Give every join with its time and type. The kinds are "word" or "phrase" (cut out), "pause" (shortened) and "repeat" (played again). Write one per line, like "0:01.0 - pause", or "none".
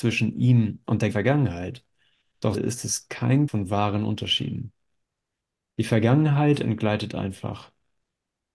0:01.1 - word
0:02.5 - word
0:03.5 - word